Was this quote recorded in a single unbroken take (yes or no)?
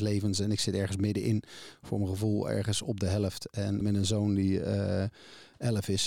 no